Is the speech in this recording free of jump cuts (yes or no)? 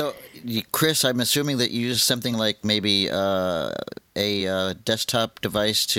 yes